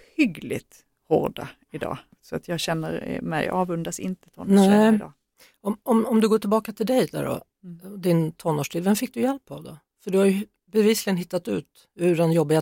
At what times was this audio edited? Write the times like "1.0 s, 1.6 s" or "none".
none